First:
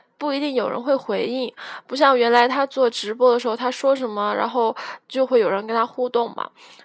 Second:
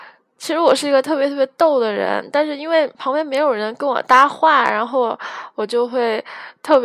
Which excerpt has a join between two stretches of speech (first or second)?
second